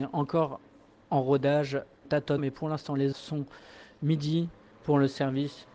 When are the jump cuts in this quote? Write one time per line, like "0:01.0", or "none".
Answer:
0:02.0
0:02.4
0:03.1